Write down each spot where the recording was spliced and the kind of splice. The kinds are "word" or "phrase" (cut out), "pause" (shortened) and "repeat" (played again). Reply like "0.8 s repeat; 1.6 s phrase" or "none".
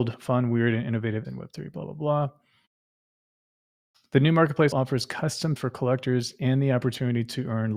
1.2 s word; 4.7 s word; 5.6 s word